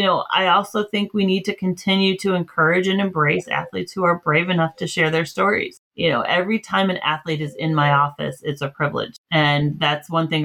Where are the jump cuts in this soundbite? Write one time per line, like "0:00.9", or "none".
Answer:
0:05.8
0:09.2